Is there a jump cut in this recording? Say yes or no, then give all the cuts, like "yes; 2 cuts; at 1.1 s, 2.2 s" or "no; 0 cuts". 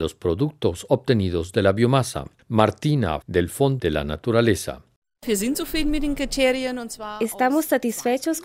yes; 2 cuts; at 3.2 s, 3.8 s